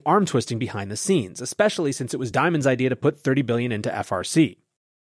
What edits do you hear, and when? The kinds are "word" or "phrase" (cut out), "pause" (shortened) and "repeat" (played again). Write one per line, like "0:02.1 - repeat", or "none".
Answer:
none